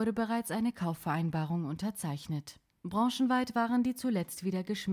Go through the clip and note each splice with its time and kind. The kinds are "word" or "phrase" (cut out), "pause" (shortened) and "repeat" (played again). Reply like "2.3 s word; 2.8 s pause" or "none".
none